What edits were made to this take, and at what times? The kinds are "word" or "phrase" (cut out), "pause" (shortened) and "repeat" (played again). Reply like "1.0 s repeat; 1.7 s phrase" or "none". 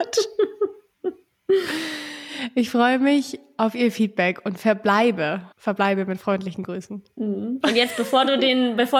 5.5 s pause